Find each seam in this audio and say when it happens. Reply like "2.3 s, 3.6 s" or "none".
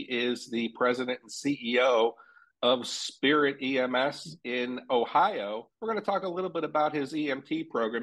5.7 s